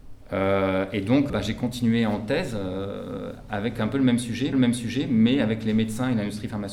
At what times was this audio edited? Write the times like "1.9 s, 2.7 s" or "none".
1.3 s, 4.5 s